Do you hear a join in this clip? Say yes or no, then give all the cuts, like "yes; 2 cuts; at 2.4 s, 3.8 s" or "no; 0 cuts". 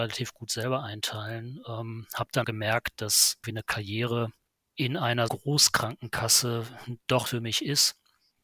yes; 5 cuts; at 2.4 s, 3.4 s, 4.5 s, 5.3 s, 7.3 s